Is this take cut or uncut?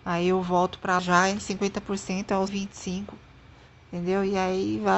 cut